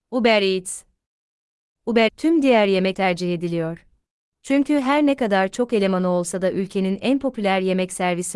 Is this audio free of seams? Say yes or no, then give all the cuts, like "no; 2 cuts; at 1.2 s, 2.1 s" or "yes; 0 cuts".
no; 3 cuts; at 2.1 s, 2.9 s, 4.1 s